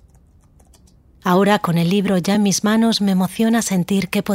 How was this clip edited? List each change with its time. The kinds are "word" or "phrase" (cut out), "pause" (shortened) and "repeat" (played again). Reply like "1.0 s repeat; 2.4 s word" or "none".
none

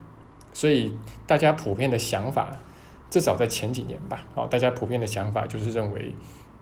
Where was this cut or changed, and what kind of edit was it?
none

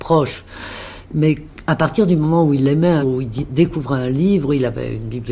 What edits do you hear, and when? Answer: 3.0 s word

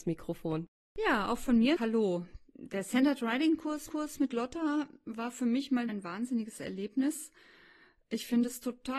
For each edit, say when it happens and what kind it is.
1.8 s phrase; 3.9 s repeat; 5.9 s word

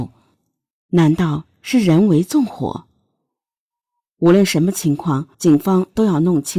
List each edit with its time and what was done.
5.3 s pause

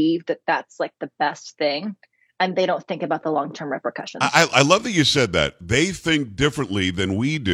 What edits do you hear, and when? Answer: none

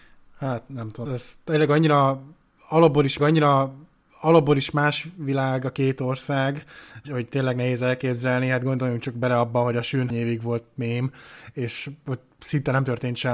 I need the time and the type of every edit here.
1.0 s word; 3.2 s repeat; 7.0 s word; 10.1 s word

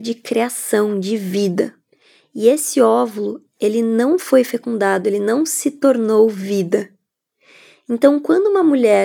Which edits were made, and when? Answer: none

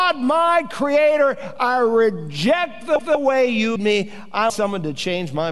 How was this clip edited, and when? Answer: 3.0 s repeat; 3.8 s word; 4.5 s word

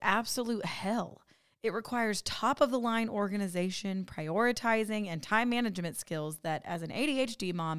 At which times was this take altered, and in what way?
none

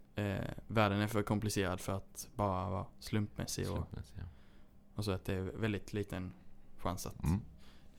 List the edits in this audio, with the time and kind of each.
none

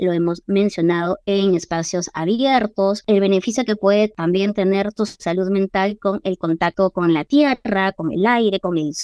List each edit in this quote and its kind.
none

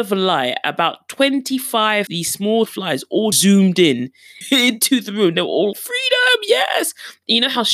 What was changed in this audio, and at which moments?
2.1 s word; 2.7 s word; 3.3 s word; 4.4 s word; 5.7 s word

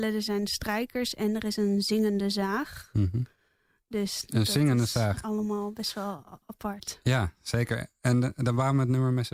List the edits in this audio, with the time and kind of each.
none

